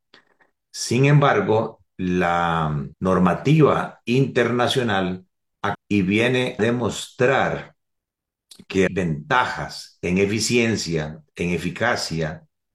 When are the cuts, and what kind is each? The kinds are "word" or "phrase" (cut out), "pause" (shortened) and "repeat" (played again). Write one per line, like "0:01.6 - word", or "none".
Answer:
0:01.9 - word
0:02.9 - pause
0:05.7 - word
0:06.6 - word
0:08.9 - word